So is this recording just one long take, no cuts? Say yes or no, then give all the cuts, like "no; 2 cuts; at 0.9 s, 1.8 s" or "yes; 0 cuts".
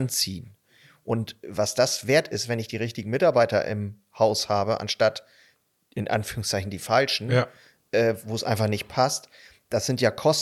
yes; 0 cuts